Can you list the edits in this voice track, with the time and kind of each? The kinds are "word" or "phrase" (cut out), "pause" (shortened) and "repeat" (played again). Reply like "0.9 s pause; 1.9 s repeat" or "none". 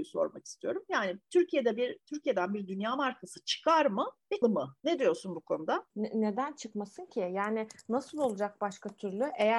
4.4 s word